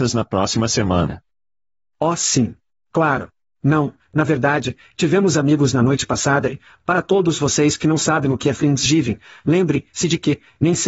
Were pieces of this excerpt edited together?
no; 0 cuts

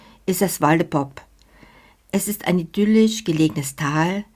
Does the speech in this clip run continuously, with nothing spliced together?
yes; 0 cuts

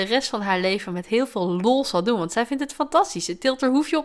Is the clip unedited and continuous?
yes; 0 cuts

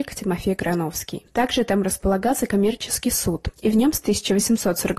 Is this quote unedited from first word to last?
yes; 0 cuts

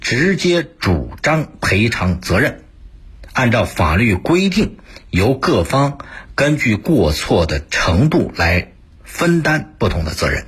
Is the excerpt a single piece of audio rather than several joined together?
yes; 0 cuts

